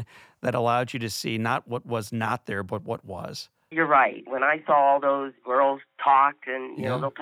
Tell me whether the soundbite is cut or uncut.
uncut